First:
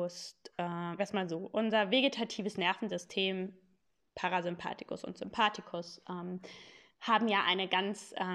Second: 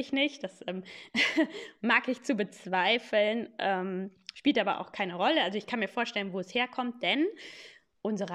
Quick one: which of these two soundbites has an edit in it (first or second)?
first